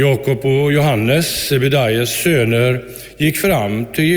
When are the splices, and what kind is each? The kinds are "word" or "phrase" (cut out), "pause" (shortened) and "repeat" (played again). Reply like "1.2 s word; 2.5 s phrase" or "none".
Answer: none